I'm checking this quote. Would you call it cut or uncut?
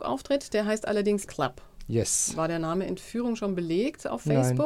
cut